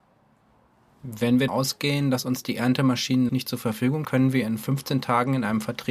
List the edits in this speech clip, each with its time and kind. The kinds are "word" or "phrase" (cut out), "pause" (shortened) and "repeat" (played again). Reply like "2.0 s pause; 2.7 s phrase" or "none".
1.5 s word; 3.3 s word; 4.0 s word

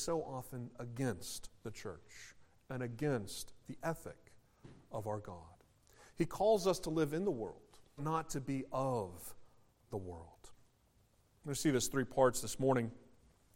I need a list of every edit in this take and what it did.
8.0 s word

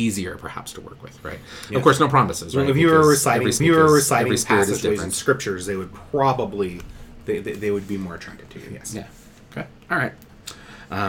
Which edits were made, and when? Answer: 3.6 s repeat

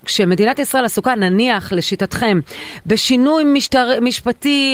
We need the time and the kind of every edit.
none

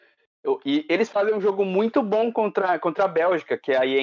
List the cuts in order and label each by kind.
none

